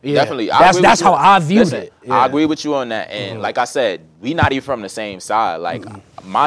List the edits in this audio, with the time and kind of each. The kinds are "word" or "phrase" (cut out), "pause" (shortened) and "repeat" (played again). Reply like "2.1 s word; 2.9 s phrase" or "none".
none